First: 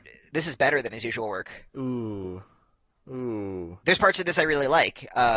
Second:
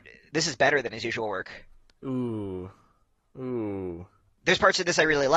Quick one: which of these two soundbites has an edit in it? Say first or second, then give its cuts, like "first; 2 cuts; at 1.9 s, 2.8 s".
first; 2 cuts; at 1.7 s, 3.8 s